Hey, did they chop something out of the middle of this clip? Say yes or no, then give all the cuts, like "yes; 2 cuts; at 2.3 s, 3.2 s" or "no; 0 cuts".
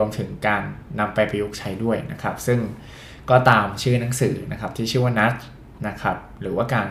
no; 0 cuts